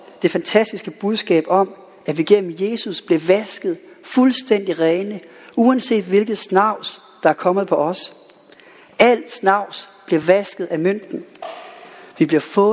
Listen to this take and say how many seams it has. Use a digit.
0